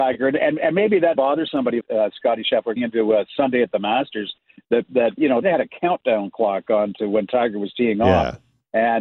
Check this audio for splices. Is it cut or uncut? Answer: cut